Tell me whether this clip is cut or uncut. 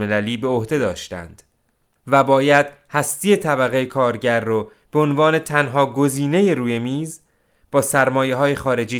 uncut